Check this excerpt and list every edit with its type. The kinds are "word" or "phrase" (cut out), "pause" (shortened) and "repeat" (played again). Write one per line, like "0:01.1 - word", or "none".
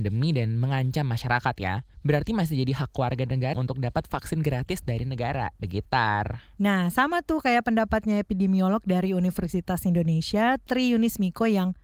0:03.5 - word